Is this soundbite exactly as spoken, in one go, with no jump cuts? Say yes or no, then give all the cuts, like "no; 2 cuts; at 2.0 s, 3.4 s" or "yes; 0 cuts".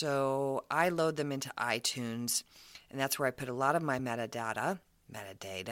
yes; 0 cuts